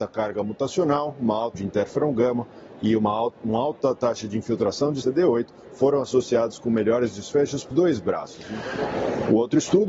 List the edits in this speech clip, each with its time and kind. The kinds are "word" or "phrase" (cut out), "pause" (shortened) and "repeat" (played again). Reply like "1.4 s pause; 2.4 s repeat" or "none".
1.5 s word; 5.0 s word; 7.7 s word

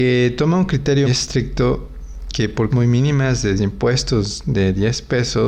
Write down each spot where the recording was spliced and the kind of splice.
1.0 s word; 2.7 s word; 3.6 s word

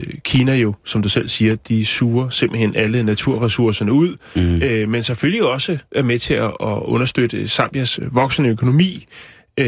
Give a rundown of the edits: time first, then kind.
5.9 s pause

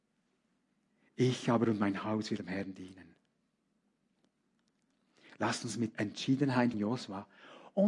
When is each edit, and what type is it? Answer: 2.4 s word; 5.9 s word; 6.7 s word

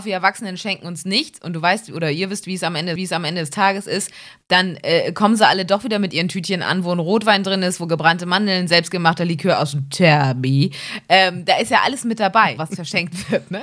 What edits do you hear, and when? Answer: 3.0 s repeat; 12.6 s word

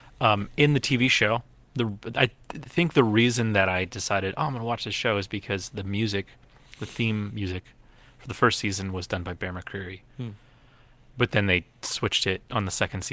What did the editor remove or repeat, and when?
none

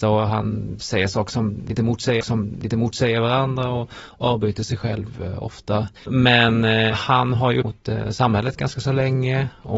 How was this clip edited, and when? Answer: 2.2 s repeat; 6.0 s pause; 7.6 s phrase

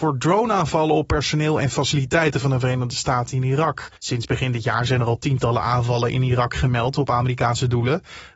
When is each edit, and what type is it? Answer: 4.0 s pause

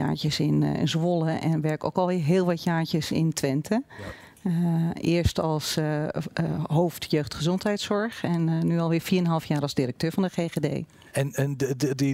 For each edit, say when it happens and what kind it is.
none

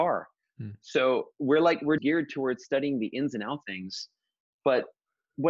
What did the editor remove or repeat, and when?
2.0 s word; 3.6 s word

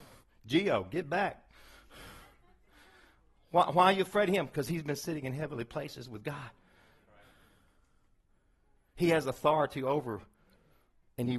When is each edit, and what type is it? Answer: none

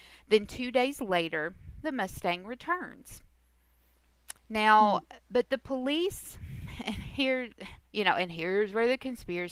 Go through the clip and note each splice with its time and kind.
4.4 s pause; 7.8 s pause

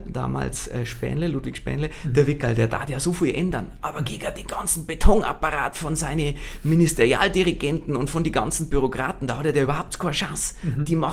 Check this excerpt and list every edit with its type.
none

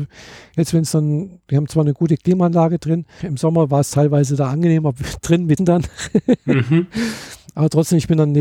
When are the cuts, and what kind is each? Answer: 3.2 s word; 5.6 s word

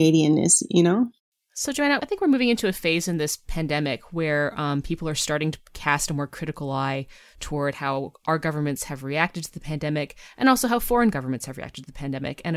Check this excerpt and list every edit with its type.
none

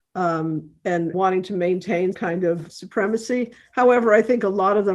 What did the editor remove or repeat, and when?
1.1 s word; 2.1 s word; 2.7 s word

